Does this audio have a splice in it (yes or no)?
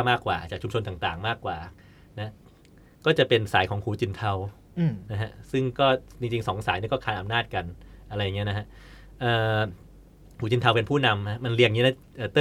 no